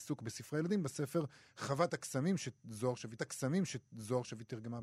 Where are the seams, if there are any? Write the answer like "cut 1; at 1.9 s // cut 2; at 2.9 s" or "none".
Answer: cut 1; at 3.2 s